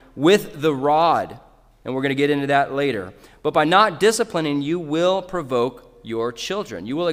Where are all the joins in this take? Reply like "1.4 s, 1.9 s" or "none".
none